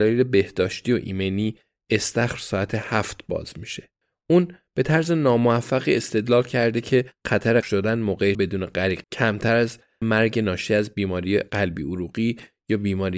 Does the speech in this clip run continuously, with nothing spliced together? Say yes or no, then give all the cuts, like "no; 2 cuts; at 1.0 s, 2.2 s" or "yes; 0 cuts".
no; 4 cuts; at 7.6 s, 8.3 s, 9.0 s, 10.0 s